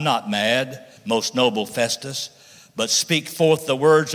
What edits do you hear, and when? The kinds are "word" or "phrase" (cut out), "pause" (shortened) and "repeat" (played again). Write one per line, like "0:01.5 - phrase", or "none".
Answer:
0:01.0 - pause